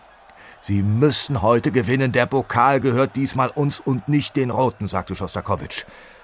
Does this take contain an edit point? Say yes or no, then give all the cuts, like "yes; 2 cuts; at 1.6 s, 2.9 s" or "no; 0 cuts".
no; 0 cuts